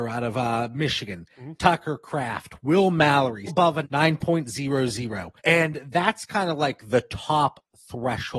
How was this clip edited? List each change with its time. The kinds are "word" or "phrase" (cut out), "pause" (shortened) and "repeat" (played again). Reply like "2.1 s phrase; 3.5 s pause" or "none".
3.5 s phrase; 3.8 s word; 5.4 s pause